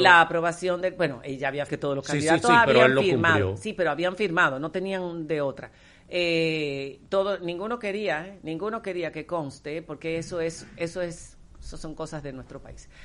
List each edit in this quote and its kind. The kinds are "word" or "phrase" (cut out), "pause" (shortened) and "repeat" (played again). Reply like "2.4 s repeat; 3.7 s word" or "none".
1.7 s phrase

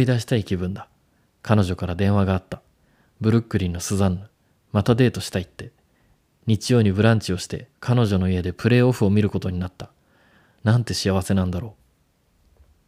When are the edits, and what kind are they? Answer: 7.7 s pause

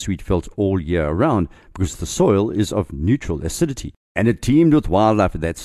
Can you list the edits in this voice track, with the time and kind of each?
none

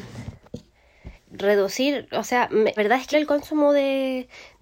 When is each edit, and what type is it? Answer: 1.2 s word; 2.8 s word; 3.1 s word

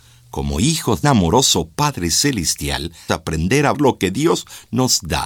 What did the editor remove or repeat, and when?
1.0 s word; 3.1 s word; 3.7 s word

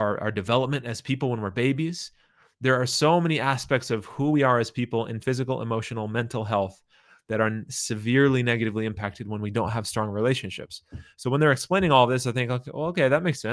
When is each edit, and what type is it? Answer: 5.2 s phrase

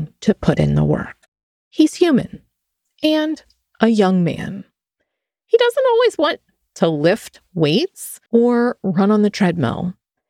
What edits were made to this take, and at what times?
8.3 s pause

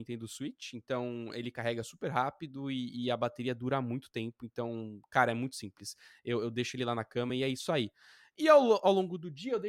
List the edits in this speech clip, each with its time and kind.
none

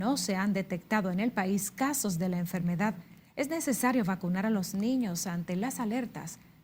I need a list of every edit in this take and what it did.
none

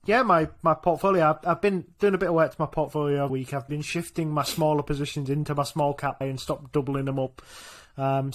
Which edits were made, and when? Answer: 3.3 s word; 3.7 s word; 6.2 s word

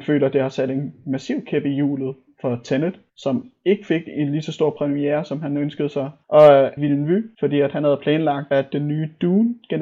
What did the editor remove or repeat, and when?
3.1 s pause; 6.8 s word

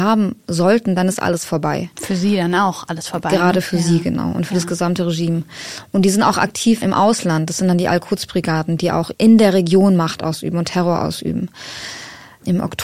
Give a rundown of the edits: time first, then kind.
6.8 s word

